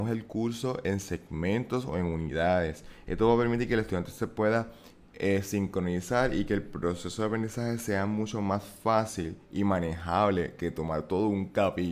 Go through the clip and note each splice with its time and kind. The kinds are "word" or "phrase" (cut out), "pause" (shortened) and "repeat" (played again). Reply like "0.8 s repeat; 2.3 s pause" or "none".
none